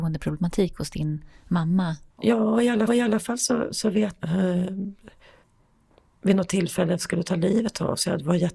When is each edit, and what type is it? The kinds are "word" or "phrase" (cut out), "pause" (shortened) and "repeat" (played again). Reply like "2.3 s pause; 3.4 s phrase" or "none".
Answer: 2.1 s pause; 2.9 s repeat; 4.2 s phrase; 5.4 s pause